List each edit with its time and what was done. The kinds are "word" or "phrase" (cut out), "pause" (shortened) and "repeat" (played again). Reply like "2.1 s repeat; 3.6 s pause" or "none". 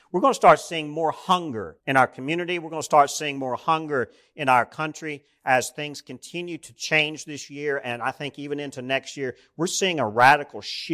1.8 s pause